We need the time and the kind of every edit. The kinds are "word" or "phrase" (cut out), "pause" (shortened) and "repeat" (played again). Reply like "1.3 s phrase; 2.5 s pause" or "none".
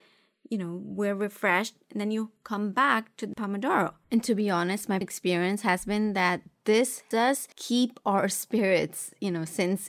2.4 s pause; 3.3 s word; 4.0 s pause; 5.0 s word; 7.1 s word; 7.5 s pause